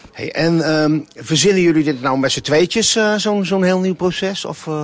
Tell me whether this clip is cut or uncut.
uncut